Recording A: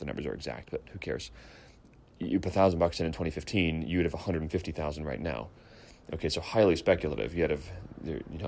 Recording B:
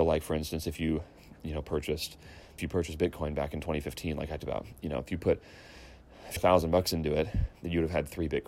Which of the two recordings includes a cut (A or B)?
B